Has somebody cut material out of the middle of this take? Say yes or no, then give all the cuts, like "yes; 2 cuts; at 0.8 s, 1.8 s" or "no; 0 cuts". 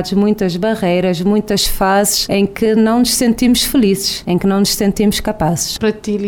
no; 0 cuts